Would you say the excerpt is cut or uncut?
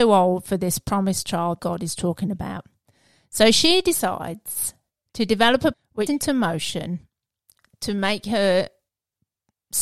cut